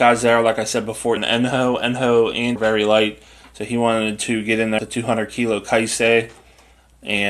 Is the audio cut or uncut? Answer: cut